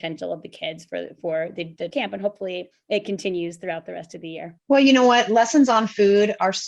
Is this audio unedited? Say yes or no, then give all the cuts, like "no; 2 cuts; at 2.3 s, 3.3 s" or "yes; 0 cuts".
no; 2 cuts; at 1.9 s, 4.6 s